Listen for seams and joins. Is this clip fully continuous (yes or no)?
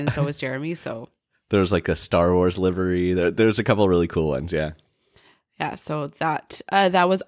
yes